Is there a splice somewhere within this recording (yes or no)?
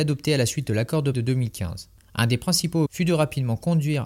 yes